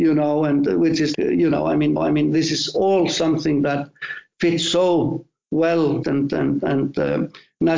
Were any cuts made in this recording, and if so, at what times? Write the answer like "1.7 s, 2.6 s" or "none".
1.1 s, 2.0 s, 6.0 s

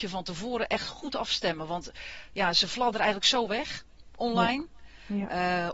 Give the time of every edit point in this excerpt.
none

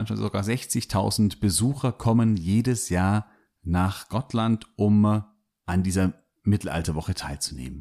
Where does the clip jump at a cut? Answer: none

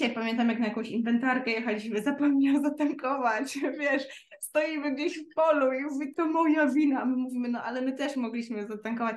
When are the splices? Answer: 6.1 s

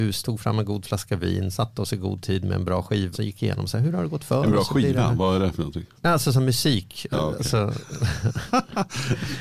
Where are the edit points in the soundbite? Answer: 3.1 s, 6.0 s, 7.1 s

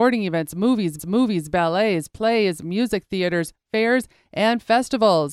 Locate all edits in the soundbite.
1.0 s

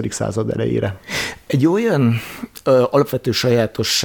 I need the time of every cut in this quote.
none

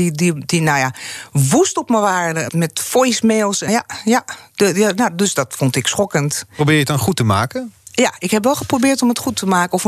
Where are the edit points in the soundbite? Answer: 2.5 s, 3.7 s

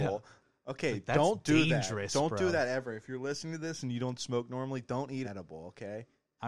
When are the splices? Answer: 5.2 s

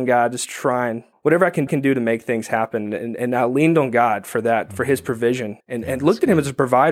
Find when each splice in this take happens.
1.1 s, 1.7 s, 5.6 s

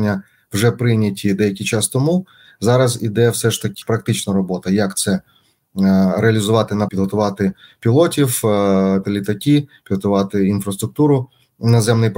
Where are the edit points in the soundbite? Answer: 3.8 s, 6.9 s, 9.0 s

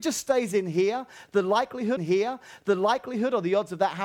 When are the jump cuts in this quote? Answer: 2.0 s

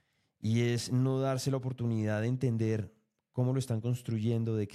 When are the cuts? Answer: none

